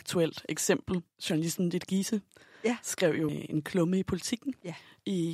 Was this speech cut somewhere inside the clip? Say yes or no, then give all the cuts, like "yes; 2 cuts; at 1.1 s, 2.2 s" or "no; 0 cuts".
yes; 1 cut; at 3.3 s